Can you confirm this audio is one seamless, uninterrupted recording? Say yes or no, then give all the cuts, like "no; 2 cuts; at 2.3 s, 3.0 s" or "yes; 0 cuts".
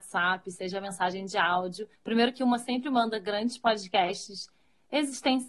no; 1 cut; at 2.0 s